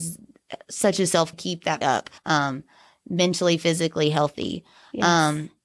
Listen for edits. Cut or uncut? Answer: cut